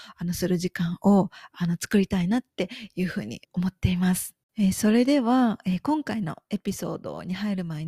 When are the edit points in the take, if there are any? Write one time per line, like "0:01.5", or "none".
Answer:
0:02.5
0:03.4